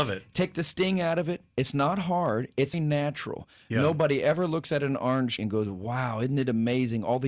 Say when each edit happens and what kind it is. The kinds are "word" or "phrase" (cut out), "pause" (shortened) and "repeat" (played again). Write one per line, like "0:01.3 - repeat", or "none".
0:02.7 - word
0:05.4 - word